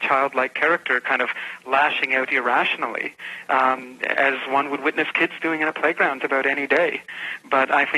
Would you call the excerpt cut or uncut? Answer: cut